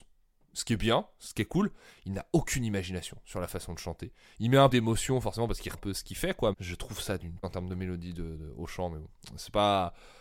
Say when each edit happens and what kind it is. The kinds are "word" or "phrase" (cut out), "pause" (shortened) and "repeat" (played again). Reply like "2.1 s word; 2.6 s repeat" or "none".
4.7 s word; 5.7 s word; 6.5 s word; 7.4 s word